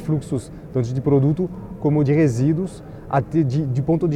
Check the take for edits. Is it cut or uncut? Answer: cut